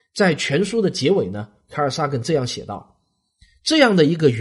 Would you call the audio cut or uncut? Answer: uncut